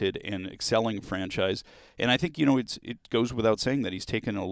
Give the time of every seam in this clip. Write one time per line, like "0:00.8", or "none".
none